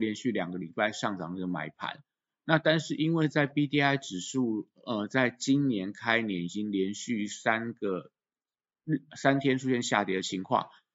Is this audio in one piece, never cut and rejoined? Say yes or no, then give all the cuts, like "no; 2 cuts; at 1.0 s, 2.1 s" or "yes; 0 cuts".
yes; 0 cuts